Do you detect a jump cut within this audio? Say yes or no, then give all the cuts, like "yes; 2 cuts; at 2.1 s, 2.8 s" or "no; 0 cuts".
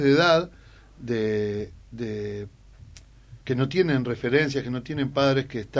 yes; 1 cut; at 3.4 s